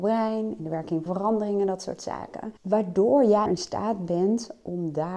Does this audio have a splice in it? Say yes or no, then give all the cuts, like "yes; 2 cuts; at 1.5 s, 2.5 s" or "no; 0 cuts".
yes; 3 cuts; at 1.1 s, 2.6 s, 3.5 s